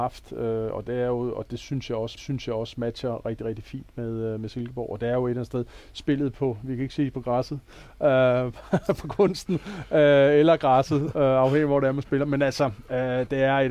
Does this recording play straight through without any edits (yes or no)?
no